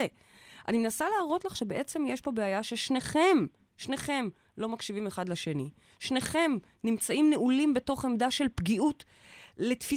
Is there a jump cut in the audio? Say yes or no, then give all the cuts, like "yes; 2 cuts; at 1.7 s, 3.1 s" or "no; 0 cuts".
no; 0 cuts